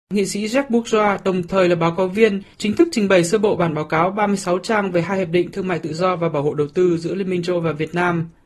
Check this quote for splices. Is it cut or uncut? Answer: cut